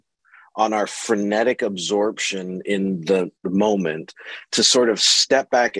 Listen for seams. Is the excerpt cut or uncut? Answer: cut